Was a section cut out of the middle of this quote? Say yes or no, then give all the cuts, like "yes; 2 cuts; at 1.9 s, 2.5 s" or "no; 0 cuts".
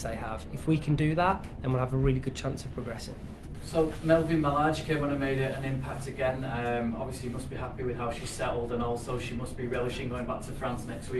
no; 0 cuts